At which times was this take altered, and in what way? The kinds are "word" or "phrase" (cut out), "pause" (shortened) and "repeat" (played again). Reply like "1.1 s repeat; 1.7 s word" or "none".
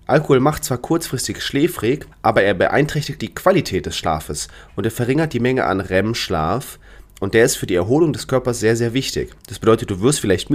2.1 s pause; 3.2 s word; 9.4 s pause